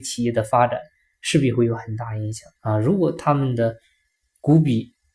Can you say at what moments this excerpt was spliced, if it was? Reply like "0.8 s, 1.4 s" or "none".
2.6 s